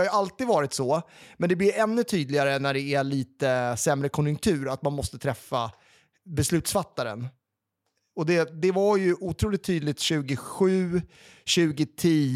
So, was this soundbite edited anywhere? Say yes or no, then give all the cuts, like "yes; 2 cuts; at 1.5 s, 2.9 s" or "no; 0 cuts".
no; 0 cuts